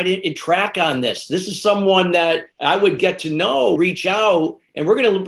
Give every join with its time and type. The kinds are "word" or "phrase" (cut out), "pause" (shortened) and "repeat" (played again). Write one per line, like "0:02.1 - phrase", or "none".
0:03.0 - word
0:03.8 - word